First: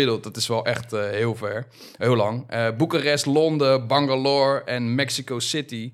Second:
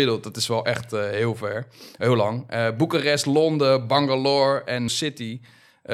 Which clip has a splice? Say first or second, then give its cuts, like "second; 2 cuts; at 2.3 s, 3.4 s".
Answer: second; 1 cut; at 4.9 s